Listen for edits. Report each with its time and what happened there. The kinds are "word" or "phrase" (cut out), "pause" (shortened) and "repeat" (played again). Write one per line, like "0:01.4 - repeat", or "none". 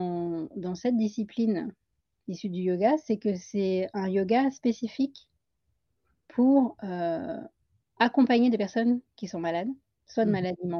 none